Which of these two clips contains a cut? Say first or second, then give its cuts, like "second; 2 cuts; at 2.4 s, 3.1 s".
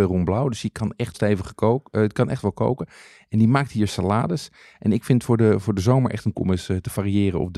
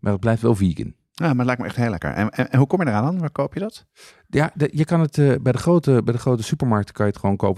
first; 3 cuts; at 1.1 s, 3.9 s, 6.3 s